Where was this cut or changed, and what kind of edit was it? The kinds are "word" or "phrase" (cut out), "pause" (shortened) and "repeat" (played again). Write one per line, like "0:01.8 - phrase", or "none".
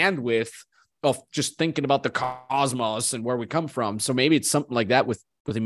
none